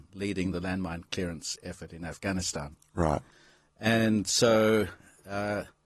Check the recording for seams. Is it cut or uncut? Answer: uncut